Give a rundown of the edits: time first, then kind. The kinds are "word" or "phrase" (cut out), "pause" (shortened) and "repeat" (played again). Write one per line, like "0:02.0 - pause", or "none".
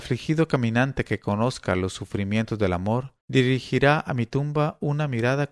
0:03.2 - pause